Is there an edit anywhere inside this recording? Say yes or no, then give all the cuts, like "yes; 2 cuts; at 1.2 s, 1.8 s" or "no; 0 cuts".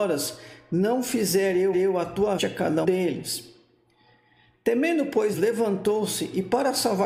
yes; 4 cuts; at 1.7 s, 2.4 s, 2.8 s, 5.3 s